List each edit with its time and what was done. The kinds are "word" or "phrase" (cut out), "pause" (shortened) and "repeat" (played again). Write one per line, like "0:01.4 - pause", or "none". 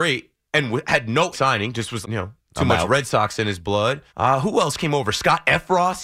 0:01.3 - phrase
0:02.0 - word
0:04.1 - pause